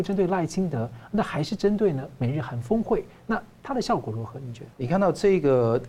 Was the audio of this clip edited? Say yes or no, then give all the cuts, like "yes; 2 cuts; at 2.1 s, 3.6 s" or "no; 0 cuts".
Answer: yes; 1 cut; at 4.7 s